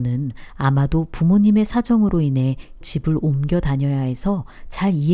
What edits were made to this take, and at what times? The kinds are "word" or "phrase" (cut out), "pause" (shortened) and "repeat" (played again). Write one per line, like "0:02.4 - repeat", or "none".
0:02.8 - word